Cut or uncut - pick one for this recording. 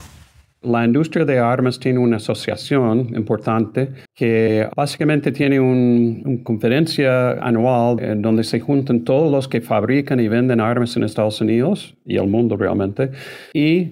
cut